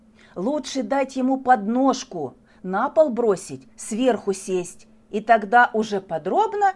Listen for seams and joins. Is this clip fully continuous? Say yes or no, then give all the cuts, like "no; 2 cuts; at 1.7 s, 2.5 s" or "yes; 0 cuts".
yes; 0 cuts